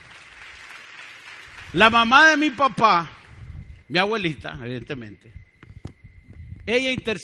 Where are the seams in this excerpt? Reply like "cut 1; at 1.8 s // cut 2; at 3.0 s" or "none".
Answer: cut 1; at 3.8 s